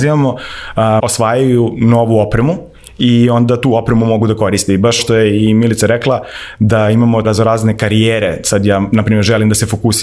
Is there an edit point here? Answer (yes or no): yes